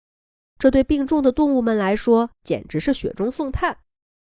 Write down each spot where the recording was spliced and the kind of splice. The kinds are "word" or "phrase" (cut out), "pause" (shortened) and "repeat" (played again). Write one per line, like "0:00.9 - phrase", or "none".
0:02.3 - pause